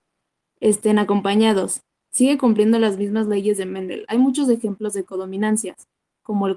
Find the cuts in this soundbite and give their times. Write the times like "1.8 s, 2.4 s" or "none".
none

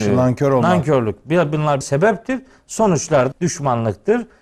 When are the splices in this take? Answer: 1.8 s, 3.3 s

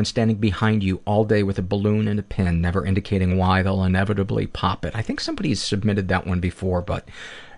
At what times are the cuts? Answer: none

